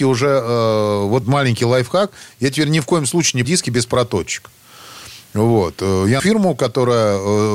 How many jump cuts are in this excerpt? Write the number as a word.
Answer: three